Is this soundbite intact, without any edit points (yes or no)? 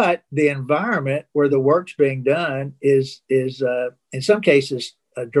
yes